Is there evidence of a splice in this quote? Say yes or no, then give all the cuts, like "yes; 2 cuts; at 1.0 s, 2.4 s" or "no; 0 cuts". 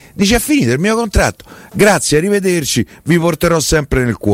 no; 0 cuts